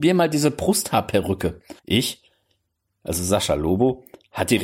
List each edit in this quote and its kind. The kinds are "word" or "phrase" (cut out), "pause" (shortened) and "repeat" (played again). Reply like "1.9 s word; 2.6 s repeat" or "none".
1.8 s pause